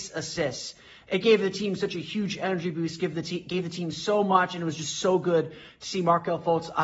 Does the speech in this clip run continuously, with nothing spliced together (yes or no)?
yes